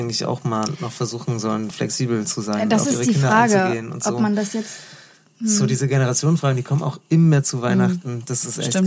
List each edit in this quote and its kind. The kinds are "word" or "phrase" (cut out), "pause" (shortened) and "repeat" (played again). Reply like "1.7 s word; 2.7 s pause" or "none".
none